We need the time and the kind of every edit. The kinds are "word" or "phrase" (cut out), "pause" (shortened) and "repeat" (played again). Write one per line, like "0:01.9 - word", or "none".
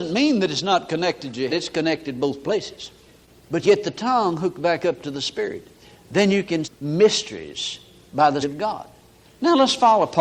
0:01.5 - word
0:03.6 - word
0:06.6 - word
0:08.4 - word

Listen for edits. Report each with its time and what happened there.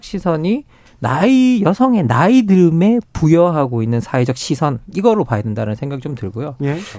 none

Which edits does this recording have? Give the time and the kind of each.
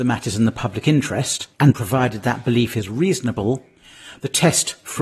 0:01.5 - pause

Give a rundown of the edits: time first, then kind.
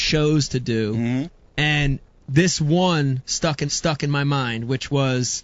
0:03.7 - repeat

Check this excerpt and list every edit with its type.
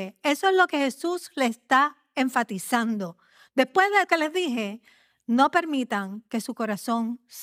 0:04.1 - phrase

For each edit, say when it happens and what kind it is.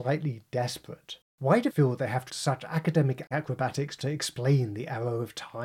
0:01.3 - pause
0:01.7 - word
0:02.3 - word

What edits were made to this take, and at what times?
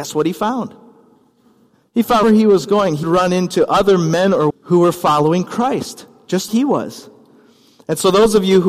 0:02.2 - word
0:03.0 - word
0:04.5 - word
0:06.5 - word

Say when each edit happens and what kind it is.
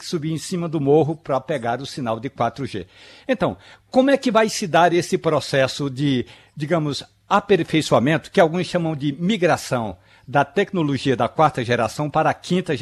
none

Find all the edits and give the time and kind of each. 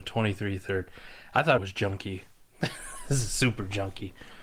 0:01.6 - word

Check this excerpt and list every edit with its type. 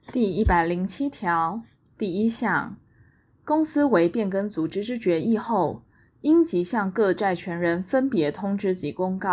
none

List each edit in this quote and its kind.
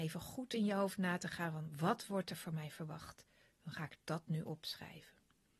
none

